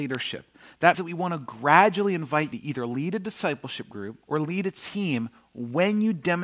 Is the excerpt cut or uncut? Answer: cut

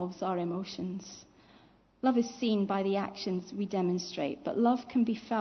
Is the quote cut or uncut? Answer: uncut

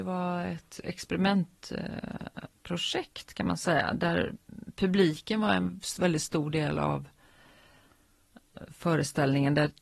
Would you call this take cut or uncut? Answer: uncut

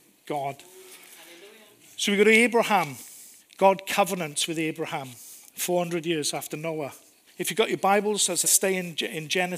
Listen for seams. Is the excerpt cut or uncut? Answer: cut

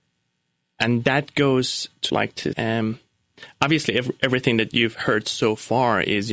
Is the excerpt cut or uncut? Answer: cut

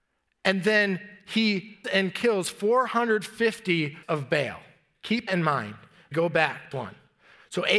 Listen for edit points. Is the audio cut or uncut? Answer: cut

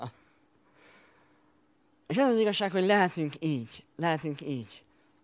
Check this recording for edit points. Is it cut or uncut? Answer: uncut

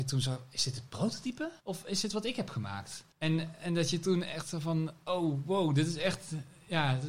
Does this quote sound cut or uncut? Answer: cut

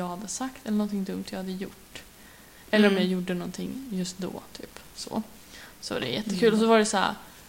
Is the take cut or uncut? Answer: uncut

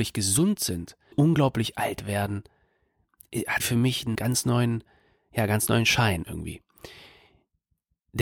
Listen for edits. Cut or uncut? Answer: cut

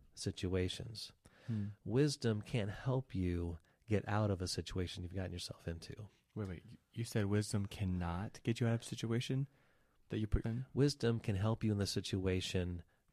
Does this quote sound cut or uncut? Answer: cut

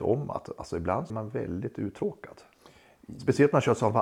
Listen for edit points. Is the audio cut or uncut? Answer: cut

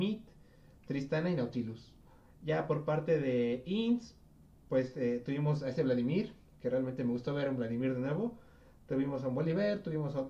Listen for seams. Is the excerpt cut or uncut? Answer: uncut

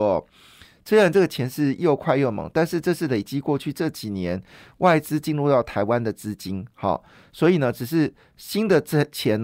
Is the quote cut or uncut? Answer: uncut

